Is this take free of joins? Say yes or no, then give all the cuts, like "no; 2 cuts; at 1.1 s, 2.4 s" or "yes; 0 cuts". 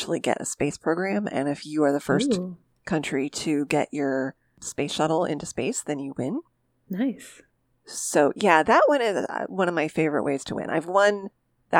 yes; 0 cuts